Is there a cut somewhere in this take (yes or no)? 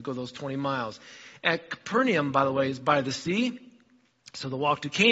no